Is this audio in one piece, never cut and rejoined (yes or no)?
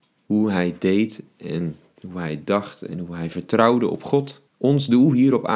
no